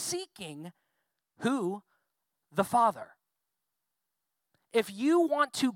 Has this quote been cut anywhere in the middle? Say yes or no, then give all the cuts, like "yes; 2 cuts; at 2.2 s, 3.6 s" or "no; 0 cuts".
no; 0 cuts